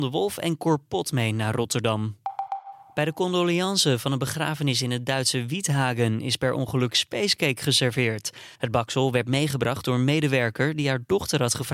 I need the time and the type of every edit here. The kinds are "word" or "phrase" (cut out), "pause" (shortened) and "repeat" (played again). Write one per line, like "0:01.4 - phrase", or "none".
0:08.5 - pause